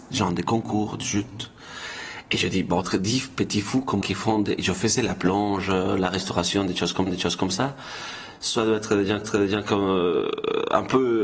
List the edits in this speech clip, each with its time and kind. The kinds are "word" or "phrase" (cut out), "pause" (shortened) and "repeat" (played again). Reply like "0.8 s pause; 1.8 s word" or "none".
2.8 s phrase; 4.0 s word; 7.1 s repeat; 9.2 s repeat